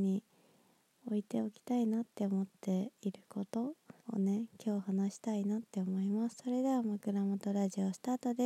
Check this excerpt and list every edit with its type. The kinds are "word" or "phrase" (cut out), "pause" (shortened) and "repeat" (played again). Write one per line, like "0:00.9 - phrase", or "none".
0:04.0 - pause